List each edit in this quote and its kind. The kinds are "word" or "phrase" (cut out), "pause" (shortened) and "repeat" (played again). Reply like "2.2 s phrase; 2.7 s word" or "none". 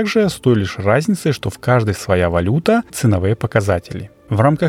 2.0 s word; 2.9 s word